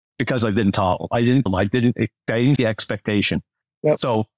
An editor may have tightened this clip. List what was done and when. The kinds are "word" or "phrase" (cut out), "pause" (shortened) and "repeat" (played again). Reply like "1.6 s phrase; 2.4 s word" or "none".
1.5 s word; 2.6 s word